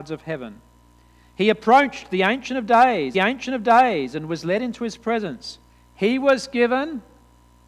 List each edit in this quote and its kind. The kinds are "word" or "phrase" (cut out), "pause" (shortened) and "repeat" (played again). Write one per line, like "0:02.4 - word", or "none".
0:03.1 - repeat
0:05.7 - pause

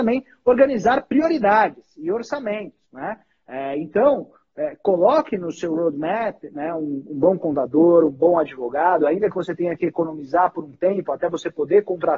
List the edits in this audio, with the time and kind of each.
0:02.8 - pause

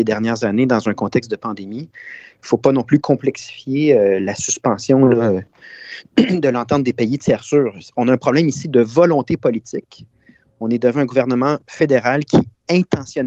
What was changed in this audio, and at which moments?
none

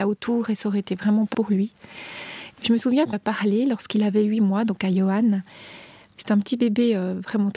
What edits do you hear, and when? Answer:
0:01.3 - word
0:03.1 - word

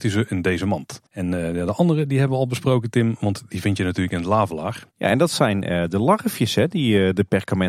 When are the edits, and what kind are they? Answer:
0:01.1 - pause
0:04.9 - pause

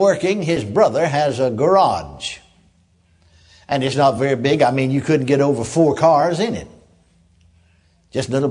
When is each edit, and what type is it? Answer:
none

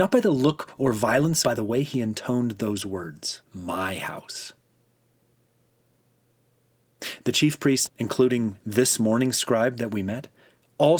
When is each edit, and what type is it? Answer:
0:01.4 - phrase
0:03.4 - pause
0:07.9 - phrase

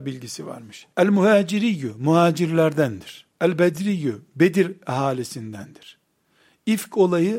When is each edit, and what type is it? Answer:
0:00.9 - pause
0:03.3 - pause

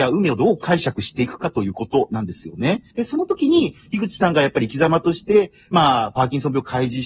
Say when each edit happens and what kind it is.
0:02.9 - pause

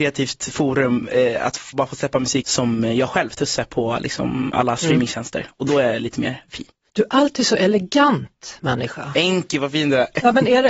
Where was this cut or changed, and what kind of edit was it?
0:01.7 - word
0:02.4 - word

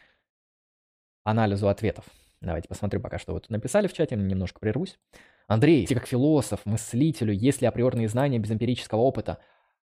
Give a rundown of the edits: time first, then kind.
0:05.9 - word

